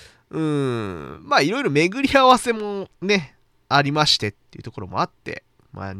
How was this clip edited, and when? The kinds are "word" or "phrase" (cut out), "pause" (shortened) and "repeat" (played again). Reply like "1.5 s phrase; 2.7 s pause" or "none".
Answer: 2.9 s pause